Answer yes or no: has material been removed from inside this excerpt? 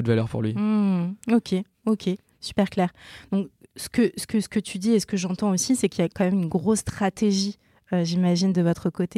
no